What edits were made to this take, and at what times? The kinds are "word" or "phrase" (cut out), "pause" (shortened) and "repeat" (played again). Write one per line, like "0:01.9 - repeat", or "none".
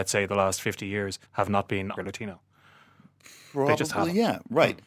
0:01.3 - pause
0:02.0 - phrase